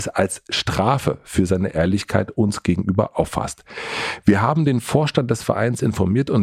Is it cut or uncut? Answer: uncut